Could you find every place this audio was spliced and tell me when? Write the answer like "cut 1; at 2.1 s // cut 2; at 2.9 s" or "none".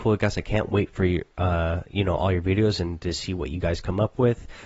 none